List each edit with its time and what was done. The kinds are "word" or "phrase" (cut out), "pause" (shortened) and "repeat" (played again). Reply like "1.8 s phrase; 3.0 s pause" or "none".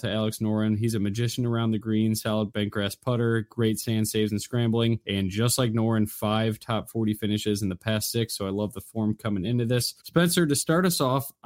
none